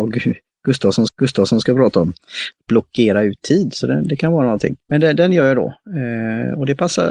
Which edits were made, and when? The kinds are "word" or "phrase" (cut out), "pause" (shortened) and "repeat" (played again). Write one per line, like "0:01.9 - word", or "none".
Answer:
0:01.1 - repeat
0:04.8 - pause

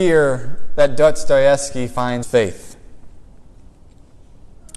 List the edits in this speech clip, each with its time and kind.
0:02.2 - word

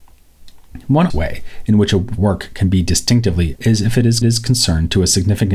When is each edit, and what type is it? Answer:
0:01.1 - word
0:02.2 - word
0:03.6 - word
0:04.2 - repeat

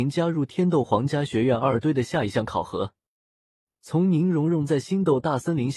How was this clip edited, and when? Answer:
none

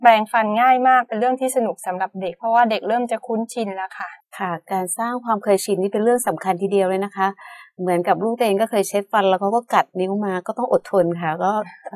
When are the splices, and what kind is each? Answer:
0:04.2 - pause

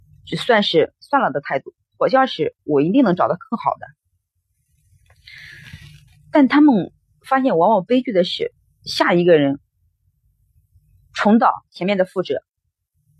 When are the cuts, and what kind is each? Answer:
none

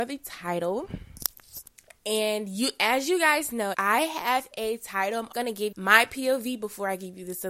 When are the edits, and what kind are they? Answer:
0:03.7 - word
0:05.3 - word
0:05.7 - word

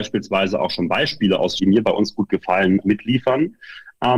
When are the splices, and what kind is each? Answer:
0:01.6 - word
0:02.8 - word

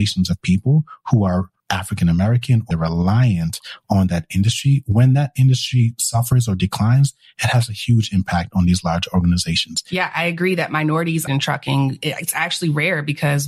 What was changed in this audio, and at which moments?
0:01.6 - pause
0:02.7 - phrase
0:11.3 - phrase

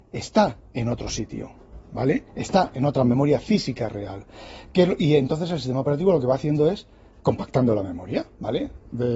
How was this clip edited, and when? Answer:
0:02.3 - pause

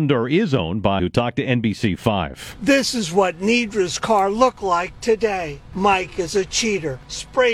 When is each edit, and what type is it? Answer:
0:01.0 - phrase

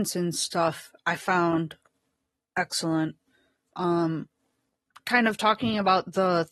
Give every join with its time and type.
0:01.0 - word
0:03.7 - word

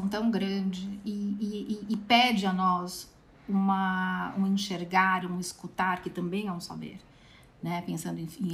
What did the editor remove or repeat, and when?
none

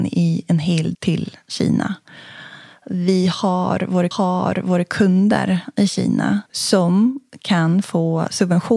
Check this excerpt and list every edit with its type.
0:00.9 - word
0:04.1 - repeat
0:06.5 - pause

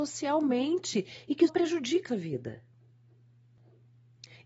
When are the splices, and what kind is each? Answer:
0:01.5 - word
0:02.1 - word

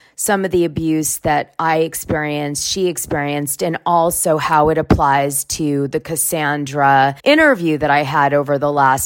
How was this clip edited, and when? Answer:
0:07.2 - pause

